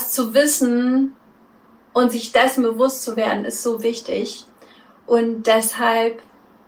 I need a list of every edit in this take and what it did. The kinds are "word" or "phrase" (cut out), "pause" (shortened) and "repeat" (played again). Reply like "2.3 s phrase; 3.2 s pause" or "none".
none